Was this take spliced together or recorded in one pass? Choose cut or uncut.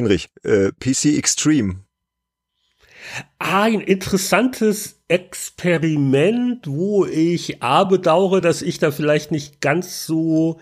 uncut